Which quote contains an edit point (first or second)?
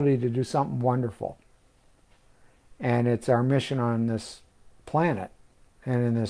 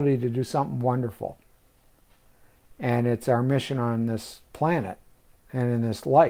second